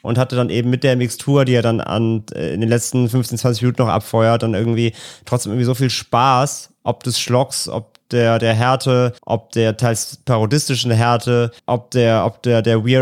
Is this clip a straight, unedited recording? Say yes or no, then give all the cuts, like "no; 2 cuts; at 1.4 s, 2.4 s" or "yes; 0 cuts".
no; 2 cuts; at 9.2 s, 11.6 s